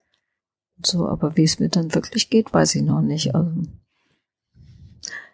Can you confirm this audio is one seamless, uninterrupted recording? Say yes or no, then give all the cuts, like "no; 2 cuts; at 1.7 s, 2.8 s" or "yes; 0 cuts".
yes; 0 cuts